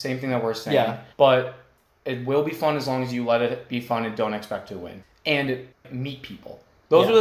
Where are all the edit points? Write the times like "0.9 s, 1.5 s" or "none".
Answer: 1.1 s

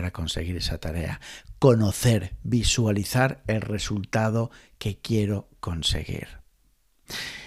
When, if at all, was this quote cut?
none

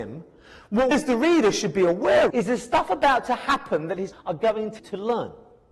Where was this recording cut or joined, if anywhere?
0.9 s, 2.3 s, 4.1 s, 4.8 s

